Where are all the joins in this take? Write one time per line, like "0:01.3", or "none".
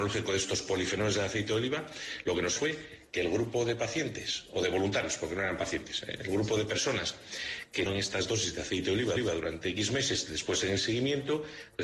0:02.6
0:07.9
0:09.2